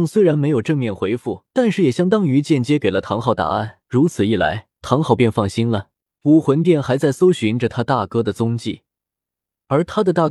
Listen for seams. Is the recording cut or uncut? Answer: cut